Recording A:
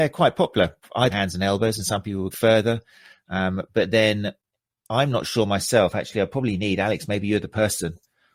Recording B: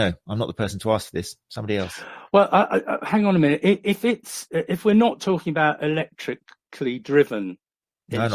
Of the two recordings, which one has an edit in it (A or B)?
A